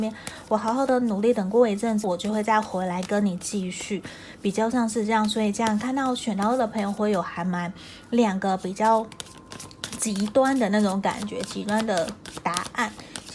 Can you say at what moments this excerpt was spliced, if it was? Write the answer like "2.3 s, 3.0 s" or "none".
2.0 s